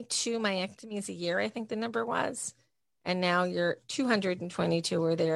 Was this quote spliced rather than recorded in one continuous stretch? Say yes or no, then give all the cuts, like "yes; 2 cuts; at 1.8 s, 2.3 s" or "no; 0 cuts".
no; 0 cuts